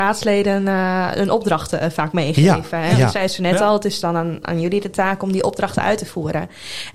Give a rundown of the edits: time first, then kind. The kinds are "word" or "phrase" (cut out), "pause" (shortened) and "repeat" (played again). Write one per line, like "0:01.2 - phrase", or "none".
0:04.4 - word